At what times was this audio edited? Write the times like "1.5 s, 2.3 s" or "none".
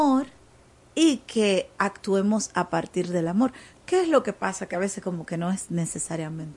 none